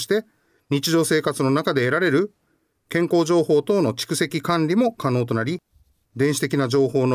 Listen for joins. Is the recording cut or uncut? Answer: uncut